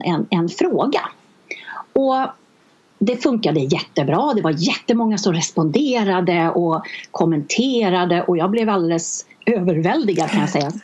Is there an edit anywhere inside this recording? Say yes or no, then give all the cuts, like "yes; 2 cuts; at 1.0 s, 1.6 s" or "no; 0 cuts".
no; 0 cuts